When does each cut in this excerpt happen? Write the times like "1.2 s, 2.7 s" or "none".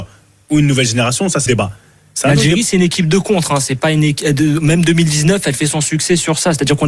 1.5 s